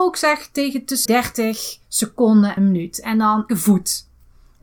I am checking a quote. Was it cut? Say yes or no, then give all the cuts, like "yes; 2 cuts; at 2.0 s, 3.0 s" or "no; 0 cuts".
yes; 3 cuts; at 1.1 s, 2.6 s, 3.5 s